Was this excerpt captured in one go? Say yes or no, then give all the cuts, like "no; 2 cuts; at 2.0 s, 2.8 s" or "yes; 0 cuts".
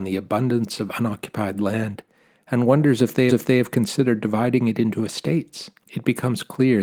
no; 2 cuts; at 3.3 s, 5.8 s